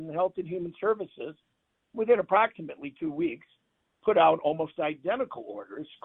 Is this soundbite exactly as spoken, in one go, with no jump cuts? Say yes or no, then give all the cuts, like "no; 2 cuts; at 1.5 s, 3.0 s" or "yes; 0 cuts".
yes; 0 cuts